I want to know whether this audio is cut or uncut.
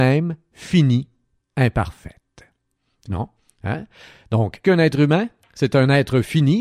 cut